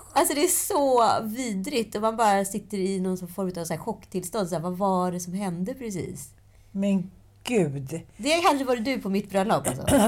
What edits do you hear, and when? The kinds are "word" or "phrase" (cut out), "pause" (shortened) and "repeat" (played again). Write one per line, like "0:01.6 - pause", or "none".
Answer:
none